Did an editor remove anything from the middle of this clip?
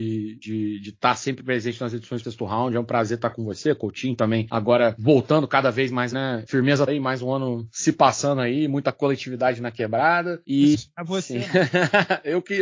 yes; 4 cuts; at 2.2 s, 6.1 s, 6.9 s, 10.7 s

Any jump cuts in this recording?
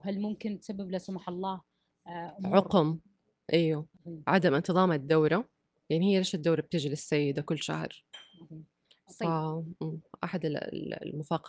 yes; 1 cut; at 3.9 s

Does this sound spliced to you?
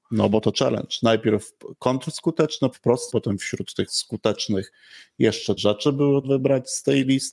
yes; 5 cuts; at 2.7 s, 3.1 s, 3.9 s, 5.6 s, 6.2 s

